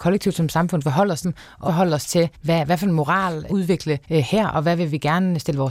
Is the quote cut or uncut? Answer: cut